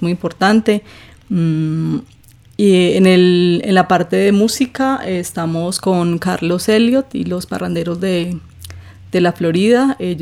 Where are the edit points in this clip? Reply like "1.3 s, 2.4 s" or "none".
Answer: none